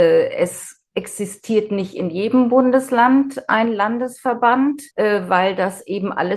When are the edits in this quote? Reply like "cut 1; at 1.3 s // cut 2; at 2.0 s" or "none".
cut 1; at 4.9 s